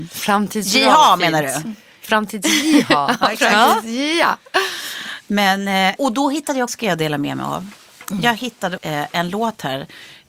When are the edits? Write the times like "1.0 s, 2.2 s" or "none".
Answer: 6.0 s, 6.7 s, 8.8 s

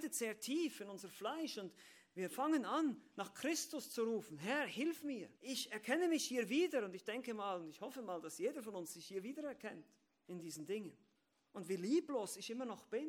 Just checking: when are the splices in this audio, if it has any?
5.4 s, 10.1 s, 11.1 s

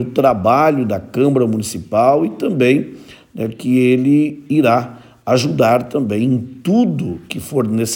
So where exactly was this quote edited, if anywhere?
none

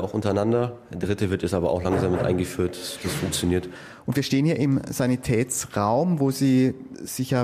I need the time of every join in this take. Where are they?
none

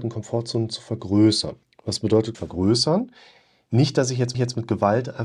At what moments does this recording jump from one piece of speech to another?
1.6 s, 2.3 s, 4.3 s

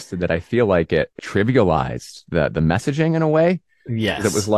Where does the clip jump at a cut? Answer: 1.2 s

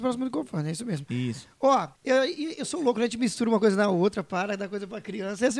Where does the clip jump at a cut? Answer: 1.9 s

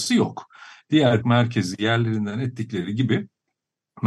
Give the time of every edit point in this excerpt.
1.2 s

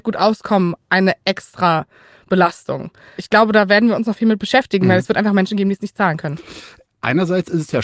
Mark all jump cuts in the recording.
none

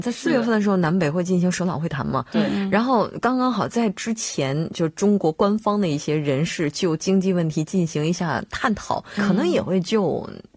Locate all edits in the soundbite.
9.2 s

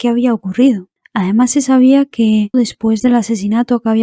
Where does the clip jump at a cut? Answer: 2.5 s

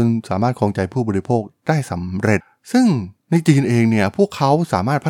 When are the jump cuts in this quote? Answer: 3.2 s

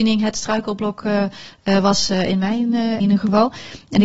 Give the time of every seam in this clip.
3.0 s

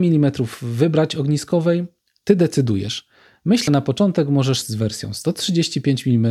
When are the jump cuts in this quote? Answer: 3.7 s, 4.6 s

